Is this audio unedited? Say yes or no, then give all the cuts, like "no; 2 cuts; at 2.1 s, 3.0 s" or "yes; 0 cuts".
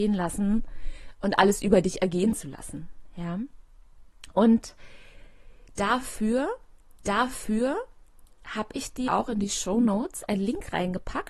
no; 2 cuts; at 7.0 s, 9.1 s